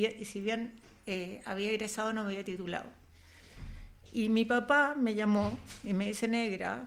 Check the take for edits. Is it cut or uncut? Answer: uncut